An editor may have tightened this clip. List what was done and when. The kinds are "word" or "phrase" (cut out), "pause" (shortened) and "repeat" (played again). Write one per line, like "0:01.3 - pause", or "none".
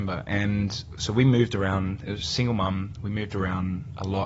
none